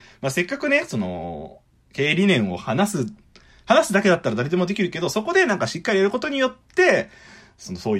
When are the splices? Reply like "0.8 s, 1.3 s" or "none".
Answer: none